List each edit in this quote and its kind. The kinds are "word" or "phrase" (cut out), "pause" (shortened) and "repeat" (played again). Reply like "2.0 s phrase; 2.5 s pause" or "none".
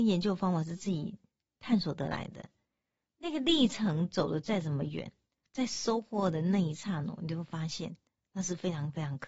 none